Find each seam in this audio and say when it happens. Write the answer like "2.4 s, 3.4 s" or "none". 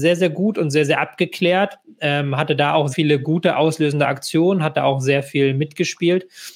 2.9 s